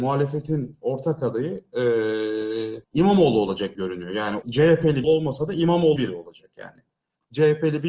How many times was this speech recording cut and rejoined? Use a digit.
6